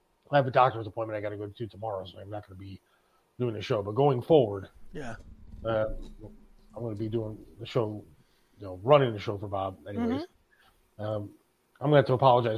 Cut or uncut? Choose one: uncut